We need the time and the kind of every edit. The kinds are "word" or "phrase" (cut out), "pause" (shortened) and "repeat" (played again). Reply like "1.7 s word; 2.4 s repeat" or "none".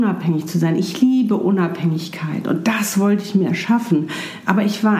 none